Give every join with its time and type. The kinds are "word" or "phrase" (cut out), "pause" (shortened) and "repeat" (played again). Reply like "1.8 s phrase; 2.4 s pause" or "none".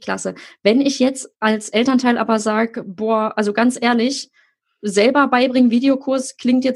none